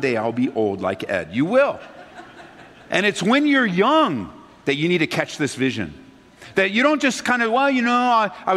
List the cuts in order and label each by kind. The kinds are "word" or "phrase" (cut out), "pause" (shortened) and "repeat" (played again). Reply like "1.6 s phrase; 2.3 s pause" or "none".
2.1 s pause